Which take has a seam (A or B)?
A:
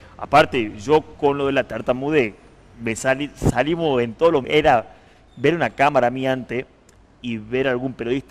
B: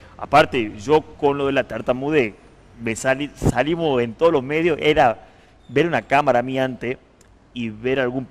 A